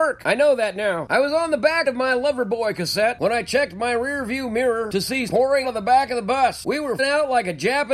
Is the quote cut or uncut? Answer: cut